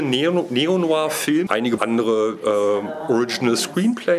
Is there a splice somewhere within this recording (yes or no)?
yes